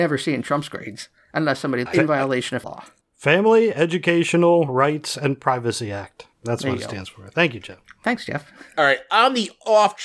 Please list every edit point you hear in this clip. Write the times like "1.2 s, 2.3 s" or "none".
1.9 s, 2.6 s, 6.3 s